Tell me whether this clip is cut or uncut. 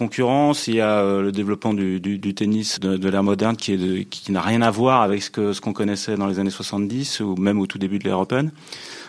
cut